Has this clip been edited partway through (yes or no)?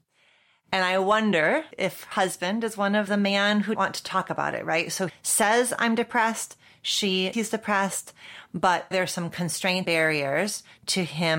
yes